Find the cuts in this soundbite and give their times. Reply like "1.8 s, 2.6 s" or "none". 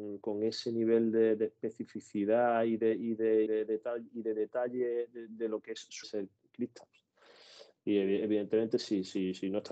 3.5 s, 6.0 s